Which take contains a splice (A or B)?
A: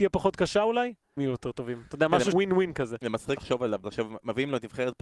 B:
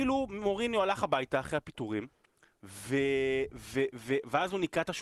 A